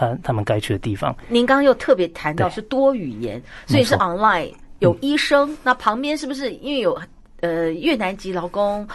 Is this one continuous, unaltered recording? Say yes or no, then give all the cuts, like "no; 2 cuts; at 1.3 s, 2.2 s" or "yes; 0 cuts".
yes; 0 cuts